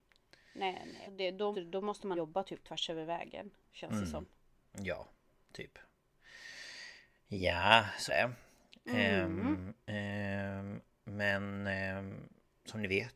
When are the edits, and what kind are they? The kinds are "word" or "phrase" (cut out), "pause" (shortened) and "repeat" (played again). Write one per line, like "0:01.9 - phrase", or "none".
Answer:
0:01.0 - word
0:01.5 - word
0:02.2 - word
0:08.1 - word
0:09.8 - word